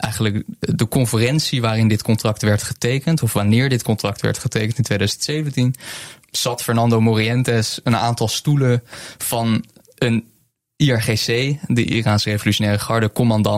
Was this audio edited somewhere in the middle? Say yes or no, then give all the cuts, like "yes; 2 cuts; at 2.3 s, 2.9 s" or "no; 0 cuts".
no; 0 cuts